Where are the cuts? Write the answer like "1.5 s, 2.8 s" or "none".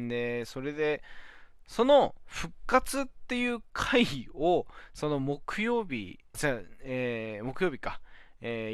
6.3 s

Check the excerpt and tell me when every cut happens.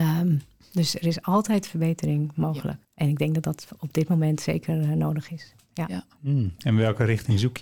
2.8 s

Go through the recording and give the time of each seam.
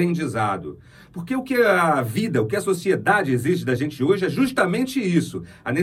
none

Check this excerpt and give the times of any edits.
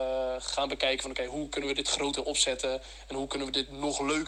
none

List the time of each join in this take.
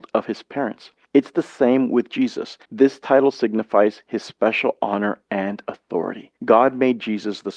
1.0 s, 2.6 s, 6.4 s

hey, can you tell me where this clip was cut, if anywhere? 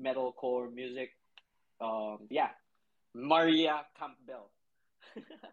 2.3 s

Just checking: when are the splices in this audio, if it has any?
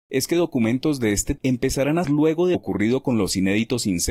1.4 s, 2.0 s, 2.5 s

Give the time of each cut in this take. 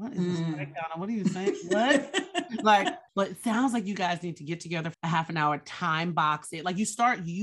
3.1 s, 4.9 s

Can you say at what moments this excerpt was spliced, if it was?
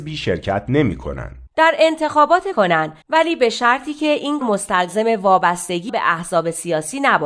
1.5 s, 2.5 s, 3.0 s, 4.4 s, 5.9 s

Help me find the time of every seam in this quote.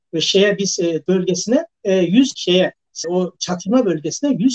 1.1 s, 1.7 s, 2.3 s, 3.0 s

